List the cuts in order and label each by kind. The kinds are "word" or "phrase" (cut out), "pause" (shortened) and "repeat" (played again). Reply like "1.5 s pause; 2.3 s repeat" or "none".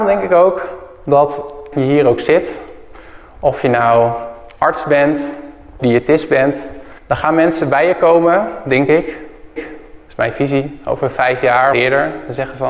1.7 s phrase; 5.8 s word; 7.0 s pause; 9.6 s repeat; 11.7 s phrase